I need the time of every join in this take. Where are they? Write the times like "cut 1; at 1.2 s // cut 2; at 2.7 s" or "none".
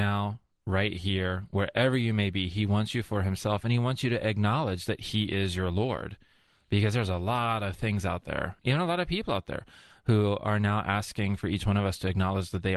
none